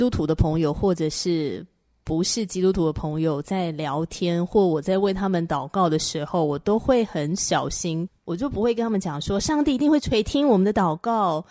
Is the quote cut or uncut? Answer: uncut